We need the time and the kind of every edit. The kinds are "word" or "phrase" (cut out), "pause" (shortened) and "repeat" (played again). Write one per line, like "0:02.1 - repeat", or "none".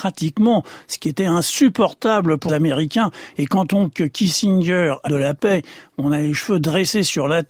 0:02.5 - word
0:03.9 - word
0:05.1 - phrase